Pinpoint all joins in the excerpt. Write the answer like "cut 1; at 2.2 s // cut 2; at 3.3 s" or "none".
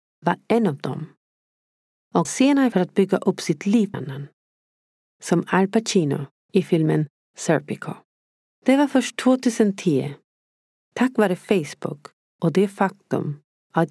cut 1; at 2.2 s // cut 2; at 2.7 s // cut 3; at 3.9 s // cut 4; at 6.3 s // cut 5; at 8.2 s